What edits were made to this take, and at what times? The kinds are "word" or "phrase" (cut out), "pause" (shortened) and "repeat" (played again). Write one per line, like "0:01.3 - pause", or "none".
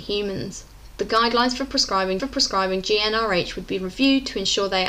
0:02.2 - repeat